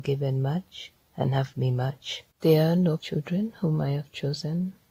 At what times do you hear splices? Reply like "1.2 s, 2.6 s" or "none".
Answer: 1.0 s, 1.5 s, 2.3 s, 3.0 s